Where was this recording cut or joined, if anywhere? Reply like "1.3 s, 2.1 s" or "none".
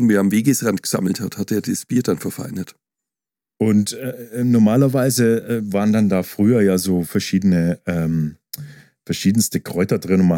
none